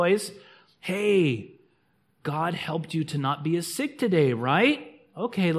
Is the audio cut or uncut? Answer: uncut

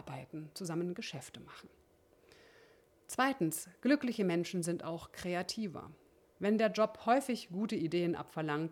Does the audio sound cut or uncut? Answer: uncut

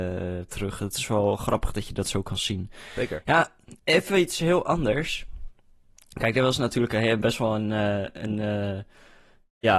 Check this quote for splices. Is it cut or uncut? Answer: cut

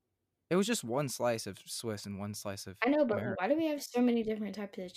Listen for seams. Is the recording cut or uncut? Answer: uncut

